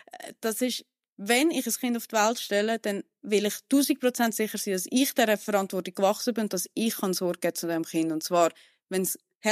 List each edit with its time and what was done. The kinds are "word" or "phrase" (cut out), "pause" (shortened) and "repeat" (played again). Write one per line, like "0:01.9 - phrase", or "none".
none